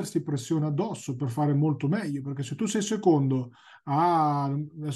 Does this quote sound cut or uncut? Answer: uncut